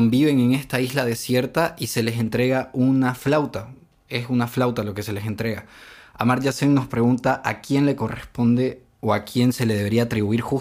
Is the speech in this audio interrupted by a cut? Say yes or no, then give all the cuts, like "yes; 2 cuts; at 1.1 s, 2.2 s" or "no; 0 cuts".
no; 0 cuts